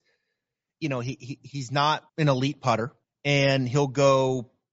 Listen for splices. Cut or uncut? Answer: cut